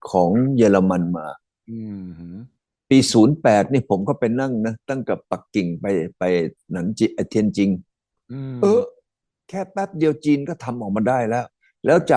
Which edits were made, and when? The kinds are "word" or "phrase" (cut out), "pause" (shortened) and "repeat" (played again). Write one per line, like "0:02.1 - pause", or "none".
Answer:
none